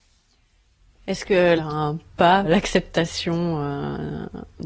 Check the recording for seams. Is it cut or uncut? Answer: cut